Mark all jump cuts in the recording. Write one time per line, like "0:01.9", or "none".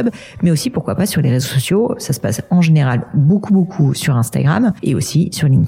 0:04.8